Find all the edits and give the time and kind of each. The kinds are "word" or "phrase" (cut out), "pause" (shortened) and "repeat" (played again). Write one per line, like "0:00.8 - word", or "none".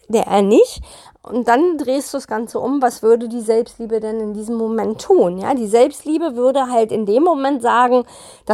none